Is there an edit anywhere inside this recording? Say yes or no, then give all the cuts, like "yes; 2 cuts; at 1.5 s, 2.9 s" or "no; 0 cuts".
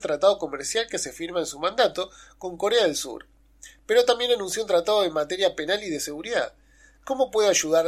no; 0 cuts